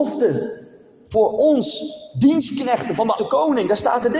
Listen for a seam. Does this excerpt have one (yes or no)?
yes